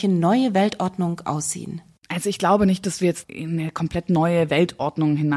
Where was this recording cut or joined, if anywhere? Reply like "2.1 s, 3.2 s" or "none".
2.0 s